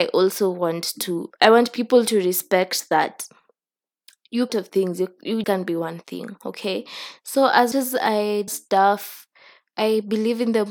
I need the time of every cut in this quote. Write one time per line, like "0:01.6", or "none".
0:04.5
0:05.4
0:07.7
0:08.5

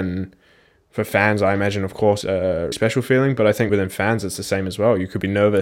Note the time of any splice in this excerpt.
0:02.2
0:02.7
0:03.7

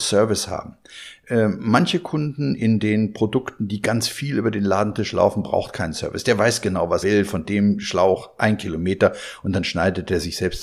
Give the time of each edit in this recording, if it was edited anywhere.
0:07.0

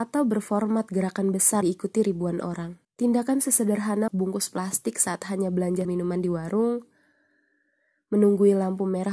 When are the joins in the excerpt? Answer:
0:01.6
0:02.8
0:04.1
0:05.8

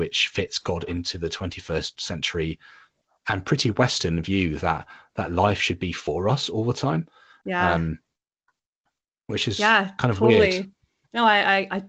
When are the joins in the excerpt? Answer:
none

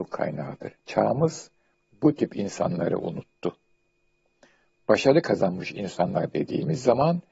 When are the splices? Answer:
none

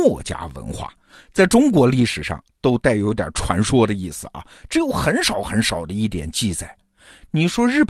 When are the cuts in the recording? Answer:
none

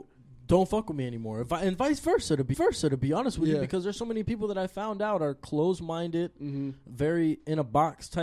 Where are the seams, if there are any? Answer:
0:02.5

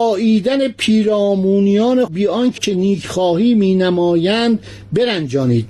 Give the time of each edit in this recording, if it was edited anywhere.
0:02.1
0:02.6

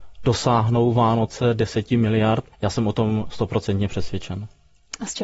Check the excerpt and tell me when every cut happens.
0:02.5

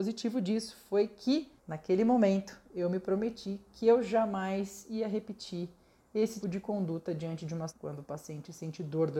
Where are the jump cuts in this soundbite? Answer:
0:01.6
0:06.4
0:07.7

